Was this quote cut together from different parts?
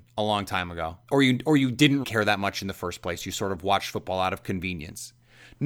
yes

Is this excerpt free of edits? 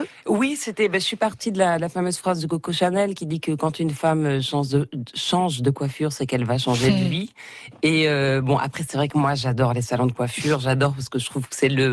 yes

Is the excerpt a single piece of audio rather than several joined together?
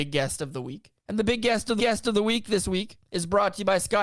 no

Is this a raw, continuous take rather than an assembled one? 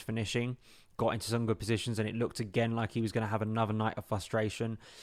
yes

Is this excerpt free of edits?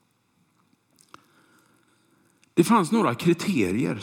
yes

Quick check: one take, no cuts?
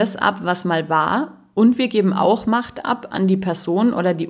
yes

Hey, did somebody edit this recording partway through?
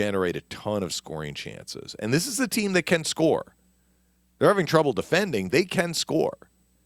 no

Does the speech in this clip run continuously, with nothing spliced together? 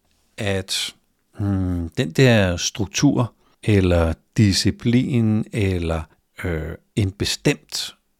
yes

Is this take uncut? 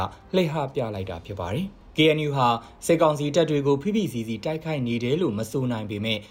yes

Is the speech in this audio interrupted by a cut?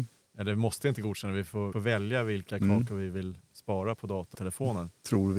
yes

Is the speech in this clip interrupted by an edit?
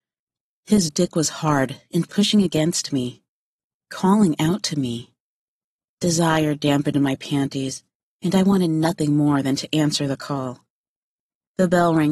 no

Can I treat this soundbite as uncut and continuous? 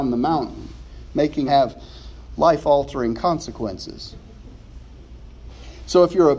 no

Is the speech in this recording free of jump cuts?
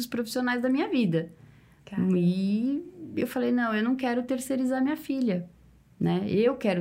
yes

